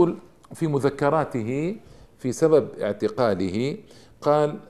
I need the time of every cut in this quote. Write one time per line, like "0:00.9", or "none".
none